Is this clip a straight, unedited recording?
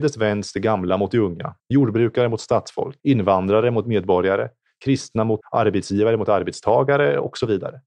no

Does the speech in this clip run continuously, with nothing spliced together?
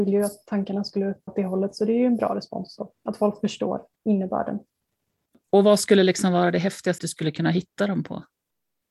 no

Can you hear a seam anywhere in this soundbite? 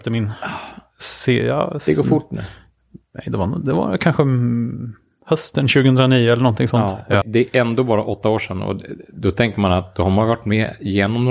yes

